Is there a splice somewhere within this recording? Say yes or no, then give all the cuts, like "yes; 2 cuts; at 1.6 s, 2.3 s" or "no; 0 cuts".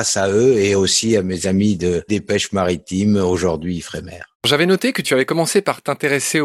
yes; 2 cuts; at 2.1 s, 4.3 s